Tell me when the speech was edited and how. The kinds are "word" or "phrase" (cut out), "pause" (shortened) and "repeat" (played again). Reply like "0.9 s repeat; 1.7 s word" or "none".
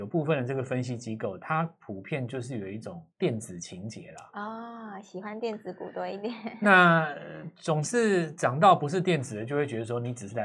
3.1 s pause

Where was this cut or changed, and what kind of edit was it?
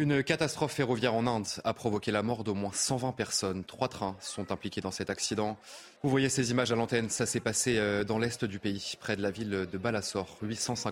6.0 s pause

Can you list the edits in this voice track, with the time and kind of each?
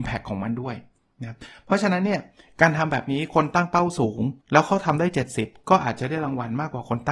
4.4 s pause

